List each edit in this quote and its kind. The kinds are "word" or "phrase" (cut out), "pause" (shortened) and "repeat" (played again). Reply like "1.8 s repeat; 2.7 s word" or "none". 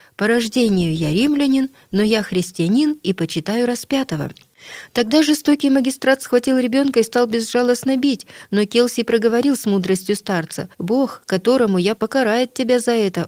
10.7 s pause; 12.0 s word